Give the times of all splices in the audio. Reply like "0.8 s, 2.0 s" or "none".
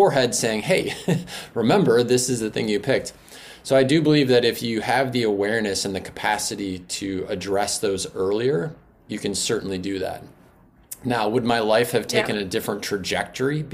none